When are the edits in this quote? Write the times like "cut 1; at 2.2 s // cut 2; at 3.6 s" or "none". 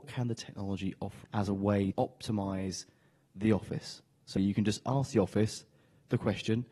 cut 1; at 1.2 s // cut 2; at 1.9 s // cut 3; at 4.4 s

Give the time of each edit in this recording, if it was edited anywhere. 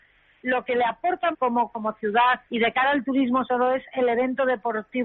cut 1; at 1.3 s // cut 2; at 1.7 s // cut 3; at 2.5 s // cut 4; at 3.4 s

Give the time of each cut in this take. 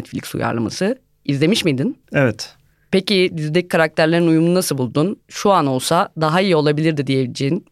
cut 1; at 2.0 s // cut 2; at 3.3 s // cut 3; at 5.2 s

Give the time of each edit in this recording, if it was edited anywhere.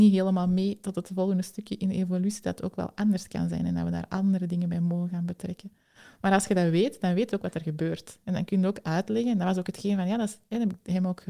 none

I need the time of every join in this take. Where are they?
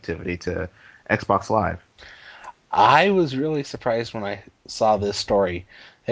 none

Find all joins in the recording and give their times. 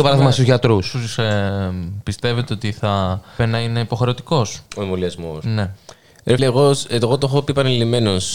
cut 1; at 1.2 s // cut 2; at 3.4 s // cut 3; at 4.7 s // cut 4; at 6.4 s

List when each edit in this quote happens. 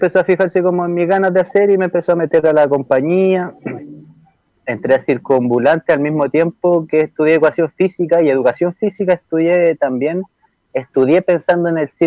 none

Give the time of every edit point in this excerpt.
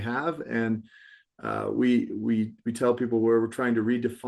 none

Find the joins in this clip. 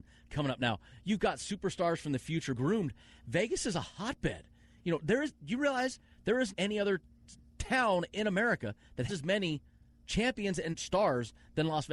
cut 1; at 2.6 s // cut 2; at 6.5 s // cut 3; at 9.1 s // cut 4; at 10.7 s

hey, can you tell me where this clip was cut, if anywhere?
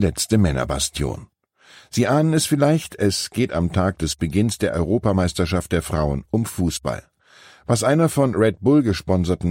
none

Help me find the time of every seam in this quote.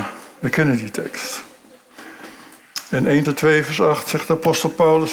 cut 1; at 3.2 s

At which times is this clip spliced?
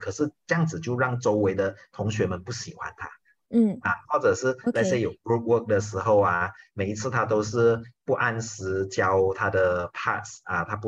none

